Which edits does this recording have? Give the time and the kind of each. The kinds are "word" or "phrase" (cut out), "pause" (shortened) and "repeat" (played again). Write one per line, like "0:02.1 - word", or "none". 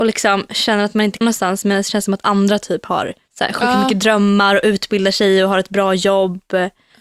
0:01.2 - word
0:02.2 - word
0:03.3 - pause